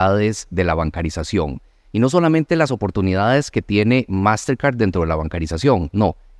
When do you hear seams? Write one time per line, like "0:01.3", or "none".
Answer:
none